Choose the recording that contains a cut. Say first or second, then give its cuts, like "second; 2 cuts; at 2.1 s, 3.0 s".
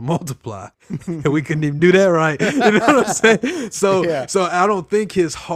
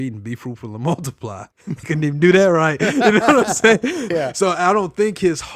second; 2 cuts; at 1.8 s, 4.1 s